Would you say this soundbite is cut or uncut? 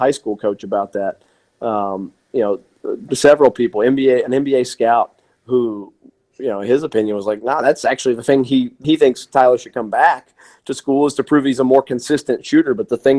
cut